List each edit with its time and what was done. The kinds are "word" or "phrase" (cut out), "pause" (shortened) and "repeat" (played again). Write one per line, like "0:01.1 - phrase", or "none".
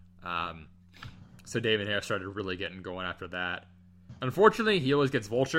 none